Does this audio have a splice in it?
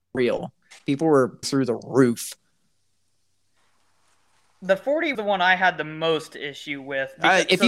yes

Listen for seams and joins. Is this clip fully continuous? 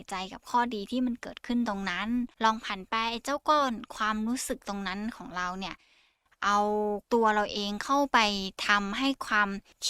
no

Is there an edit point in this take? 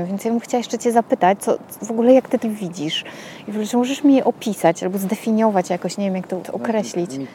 yes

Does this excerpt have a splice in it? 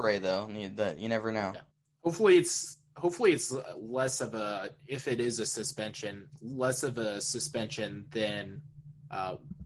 yes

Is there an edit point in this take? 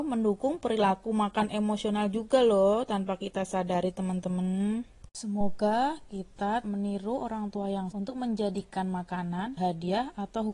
yes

